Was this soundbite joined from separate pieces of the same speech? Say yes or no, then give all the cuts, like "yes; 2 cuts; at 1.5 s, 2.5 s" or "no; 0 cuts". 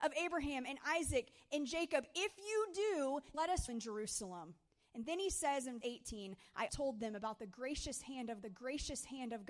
yes; 6 cuts; at 3.3 s, 3.7 s, 4.7 s, 5.8 s, 6.7 s, 8.4 s